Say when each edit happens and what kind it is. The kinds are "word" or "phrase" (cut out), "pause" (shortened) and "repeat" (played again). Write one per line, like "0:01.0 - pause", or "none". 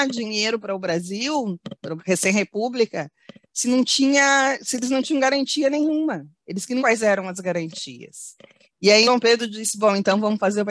0:02.0 - word
0:06.8 - word
0:09.1 - word